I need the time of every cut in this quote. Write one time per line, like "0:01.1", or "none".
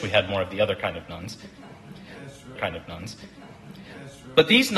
0:02.6